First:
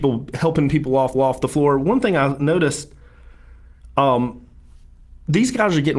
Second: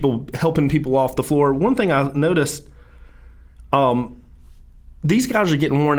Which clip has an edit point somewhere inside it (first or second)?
first